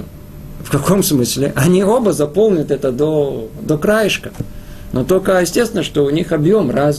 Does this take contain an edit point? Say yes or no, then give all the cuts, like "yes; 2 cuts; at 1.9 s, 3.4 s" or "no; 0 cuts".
no; 0 cuts